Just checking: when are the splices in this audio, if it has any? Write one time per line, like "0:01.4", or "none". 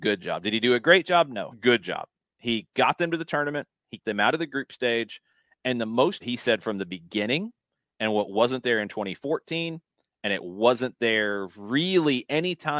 0:01.5
0:04.0
0:06.2